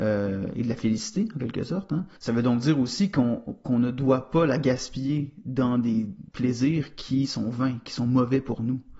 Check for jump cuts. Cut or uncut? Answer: cut